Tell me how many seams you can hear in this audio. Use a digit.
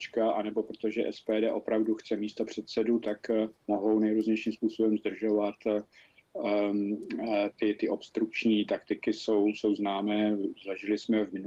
1